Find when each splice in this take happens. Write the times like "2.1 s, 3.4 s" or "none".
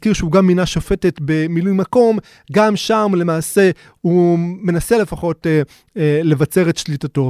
none